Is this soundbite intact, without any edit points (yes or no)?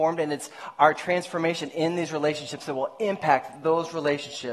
yes